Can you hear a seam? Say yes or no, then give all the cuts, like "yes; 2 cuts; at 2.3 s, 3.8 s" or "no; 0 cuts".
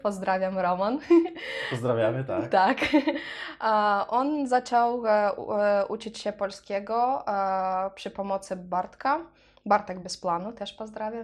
no; 0 cuts